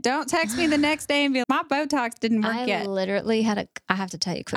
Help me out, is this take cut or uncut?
cut